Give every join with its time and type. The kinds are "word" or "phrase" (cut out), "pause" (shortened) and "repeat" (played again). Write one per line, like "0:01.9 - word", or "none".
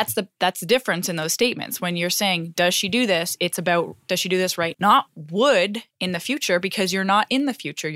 0:04.7 - word